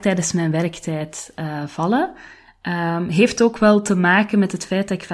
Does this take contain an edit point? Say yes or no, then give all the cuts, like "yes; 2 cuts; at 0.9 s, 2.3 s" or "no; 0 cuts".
no; 0 cuts